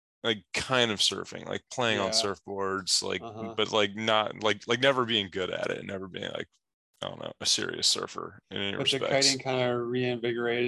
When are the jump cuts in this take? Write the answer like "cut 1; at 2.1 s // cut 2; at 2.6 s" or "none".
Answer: none